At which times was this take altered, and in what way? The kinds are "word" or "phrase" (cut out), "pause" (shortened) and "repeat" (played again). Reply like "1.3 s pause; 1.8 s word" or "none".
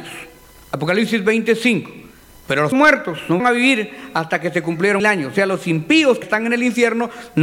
2.7 s word; 3.4 s word; 5.0 s word; 6.2 s word